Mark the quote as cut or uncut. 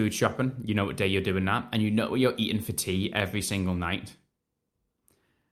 uncut